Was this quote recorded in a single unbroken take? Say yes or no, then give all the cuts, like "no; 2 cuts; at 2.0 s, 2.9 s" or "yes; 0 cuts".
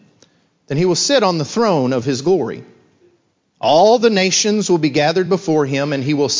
yes; 0 cuts